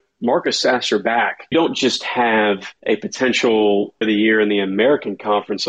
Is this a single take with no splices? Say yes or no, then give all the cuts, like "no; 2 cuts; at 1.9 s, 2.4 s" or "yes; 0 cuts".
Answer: no; 3 cuts; at 1.5 s, 2.8 s, 4.0 s